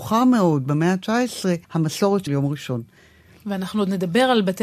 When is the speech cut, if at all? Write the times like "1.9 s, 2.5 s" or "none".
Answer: 1.6 s, 2.3 s